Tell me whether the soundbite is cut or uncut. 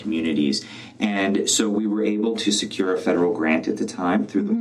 uncut